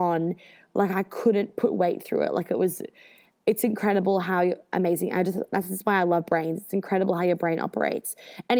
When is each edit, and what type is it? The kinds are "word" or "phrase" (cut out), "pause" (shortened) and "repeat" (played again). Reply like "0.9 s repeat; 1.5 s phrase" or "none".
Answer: none